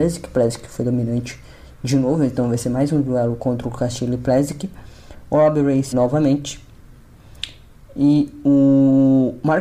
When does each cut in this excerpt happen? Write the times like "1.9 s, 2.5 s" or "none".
5.9 s